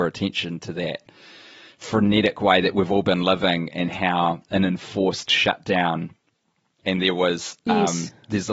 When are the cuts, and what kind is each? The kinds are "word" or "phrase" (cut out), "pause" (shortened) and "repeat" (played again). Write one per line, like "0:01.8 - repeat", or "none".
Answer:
0:06.8 - word